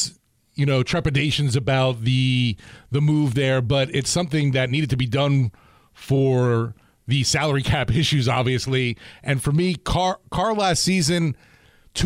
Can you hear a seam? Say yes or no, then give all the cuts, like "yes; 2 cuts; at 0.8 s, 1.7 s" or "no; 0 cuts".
no; 0 cuts